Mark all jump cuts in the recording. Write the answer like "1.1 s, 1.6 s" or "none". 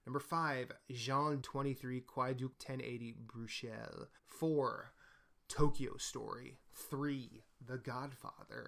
1.4 s, 2.5 s, 4.2 s